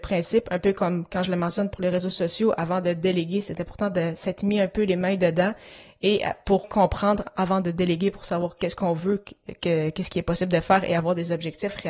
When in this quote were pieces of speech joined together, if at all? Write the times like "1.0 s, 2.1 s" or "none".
6.6 s